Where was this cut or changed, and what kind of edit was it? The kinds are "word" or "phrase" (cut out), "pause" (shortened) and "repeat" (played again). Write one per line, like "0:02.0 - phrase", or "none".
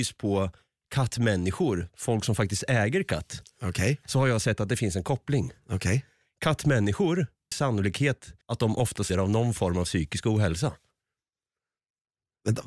0:07.5 - word
0:08.4 - pause
0:09.1 - word